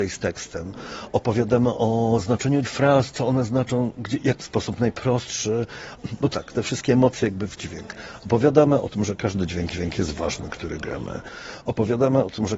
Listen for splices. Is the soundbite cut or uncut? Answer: cut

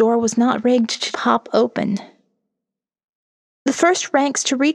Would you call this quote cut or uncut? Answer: cut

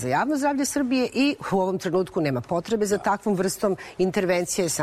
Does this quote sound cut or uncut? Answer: uncut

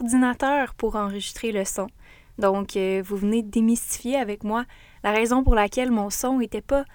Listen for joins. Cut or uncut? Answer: uncut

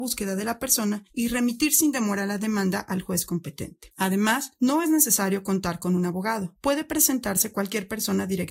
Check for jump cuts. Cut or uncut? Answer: uncut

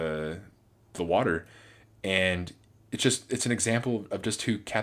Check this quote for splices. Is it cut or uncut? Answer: cut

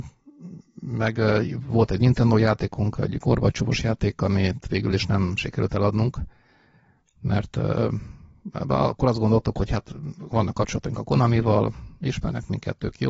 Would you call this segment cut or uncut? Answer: uncut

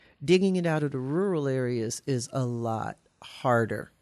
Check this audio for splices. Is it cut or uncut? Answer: uncut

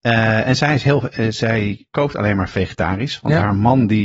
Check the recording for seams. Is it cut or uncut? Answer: uncut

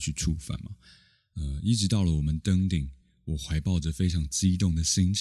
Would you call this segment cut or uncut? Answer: uncut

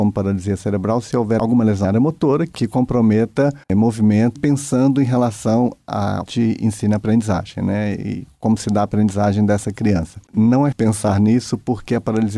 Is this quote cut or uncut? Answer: cut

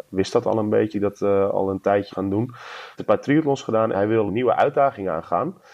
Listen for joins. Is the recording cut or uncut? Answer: cut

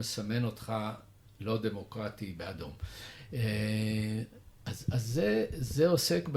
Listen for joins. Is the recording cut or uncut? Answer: uncut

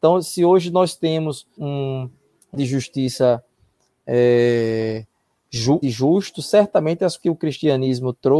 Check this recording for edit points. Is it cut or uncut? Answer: cut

